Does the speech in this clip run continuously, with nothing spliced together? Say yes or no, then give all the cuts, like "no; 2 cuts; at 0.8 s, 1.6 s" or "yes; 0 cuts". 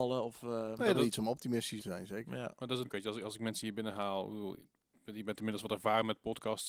no; 3 cuts; at 0.9 s, 1.8 s, 2.8 s